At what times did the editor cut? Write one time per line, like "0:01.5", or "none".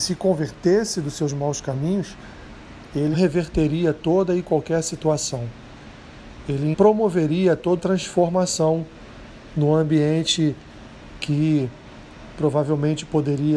0:03.1
0:06.7
0:07.8

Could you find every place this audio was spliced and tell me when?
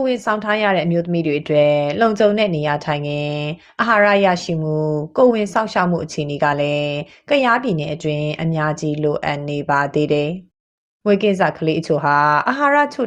none

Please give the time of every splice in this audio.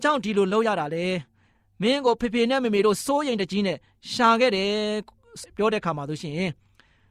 none

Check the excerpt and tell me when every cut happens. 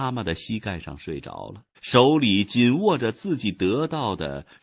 0:01.7

